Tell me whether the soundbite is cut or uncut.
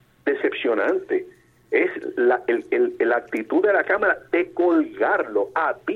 uncut